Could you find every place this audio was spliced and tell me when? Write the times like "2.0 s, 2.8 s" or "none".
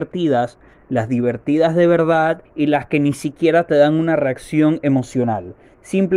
2.4 s